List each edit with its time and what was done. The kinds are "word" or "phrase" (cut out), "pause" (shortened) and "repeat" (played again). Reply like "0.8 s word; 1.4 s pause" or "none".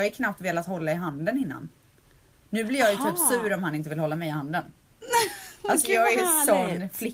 none